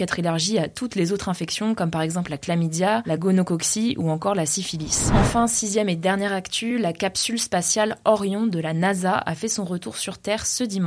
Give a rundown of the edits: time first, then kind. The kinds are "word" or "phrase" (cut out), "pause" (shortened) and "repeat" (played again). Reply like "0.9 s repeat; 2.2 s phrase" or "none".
none